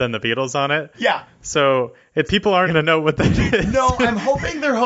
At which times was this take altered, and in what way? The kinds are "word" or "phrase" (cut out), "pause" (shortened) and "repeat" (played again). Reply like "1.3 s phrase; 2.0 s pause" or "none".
2.3 s word; 2.7 s word